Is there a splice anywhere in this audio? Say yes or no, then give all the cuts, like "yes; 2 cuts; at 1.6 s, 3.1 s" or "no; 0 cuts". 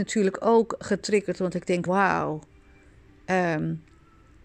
yes; 1 cut; at 1.9 s